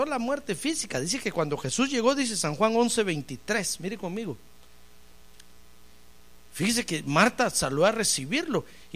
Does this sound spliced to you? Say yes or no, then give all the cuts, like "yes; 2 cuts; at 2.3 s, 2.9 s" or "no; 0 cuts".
no; 0 cuts